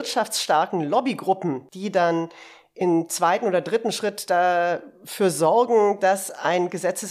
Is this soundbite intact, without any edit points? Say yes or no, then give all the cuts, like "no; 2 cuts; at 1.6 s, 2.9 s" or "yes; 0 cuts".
yes; 0 cuts